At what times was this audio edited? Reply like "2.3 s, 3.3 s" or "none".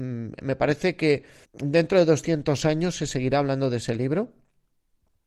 1.4 s